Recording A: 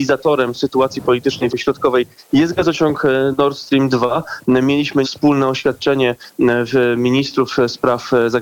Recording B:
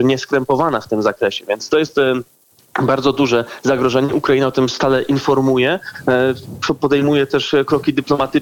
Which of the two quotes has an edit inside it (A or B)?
A